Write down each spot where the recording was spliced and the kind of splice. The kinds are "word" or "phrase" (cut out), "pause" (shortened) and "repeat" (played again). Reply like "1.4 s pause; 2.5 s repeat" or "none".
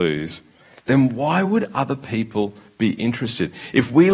none